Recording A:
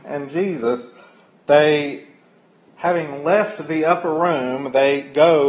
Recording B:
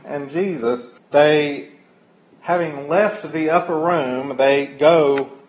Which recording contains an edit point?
B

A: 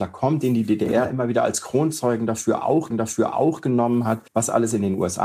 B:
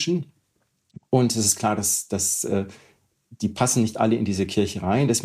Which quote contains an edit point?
A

